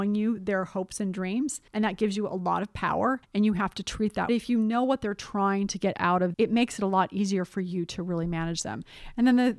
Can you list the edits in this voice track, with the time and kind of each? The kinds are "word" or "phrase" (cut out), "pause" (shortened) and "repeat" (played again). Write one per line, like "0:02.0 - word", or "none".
0:01.7 - pause
0:03.2 - pause
0:04.3 - phrase
0:06.3 - phrase